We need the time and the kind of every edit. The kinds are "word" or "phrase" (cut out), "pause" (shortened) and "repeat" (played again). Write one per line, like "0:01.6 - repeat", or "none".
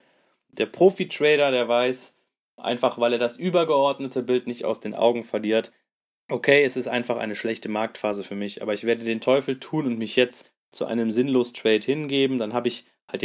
none